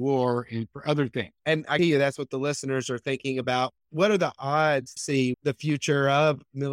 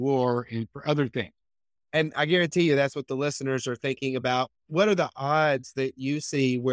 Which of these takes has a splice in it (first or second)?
first